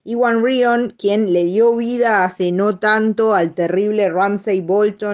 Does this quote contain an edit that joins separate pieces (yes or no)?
no